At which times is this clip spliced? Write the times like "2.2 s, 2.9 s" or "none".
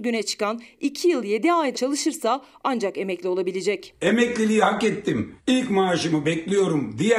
1.7 s, 5.4 s